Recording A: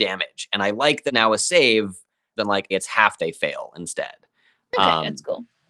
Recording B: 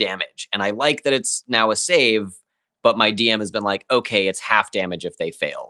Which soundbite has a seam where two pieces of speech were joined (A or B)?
A